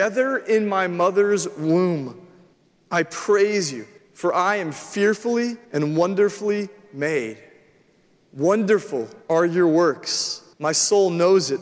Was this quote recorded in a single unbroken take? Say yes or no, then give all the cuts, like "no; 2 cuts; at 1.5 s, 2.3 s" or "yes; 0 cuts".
no; 5 cuts; at 2.5 s, 4.0 s, 5.6 s, 9.2 s, 10.5 s